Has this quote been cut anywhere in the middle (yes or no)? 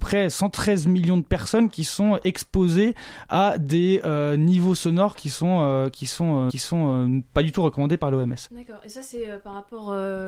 yes